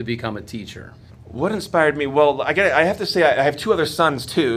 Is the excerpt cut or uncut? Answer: cut